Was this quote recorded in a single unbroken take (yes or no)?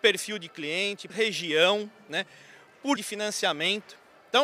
no